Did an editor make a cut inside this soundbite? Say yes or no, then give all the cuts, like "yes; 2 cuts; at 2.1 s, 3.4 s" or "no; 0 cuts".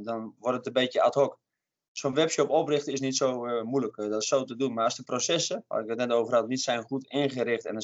no; 0 cuts